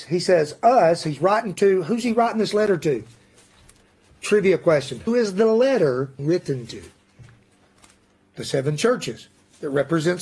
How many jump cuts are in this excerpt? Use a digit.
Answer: 2